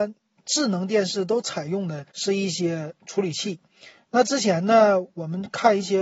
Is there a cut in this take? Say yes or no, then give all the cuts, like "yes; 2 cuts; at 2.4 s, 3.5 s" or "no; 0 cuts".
yes; 1 cut; at 2.1 s